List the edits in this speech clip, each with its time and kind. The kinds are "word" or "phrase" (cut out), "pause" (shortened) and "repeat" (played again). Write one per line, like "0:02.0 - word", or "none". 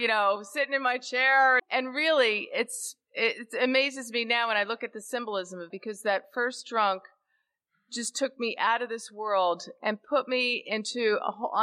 0:01.6 - word
0:05.7 - word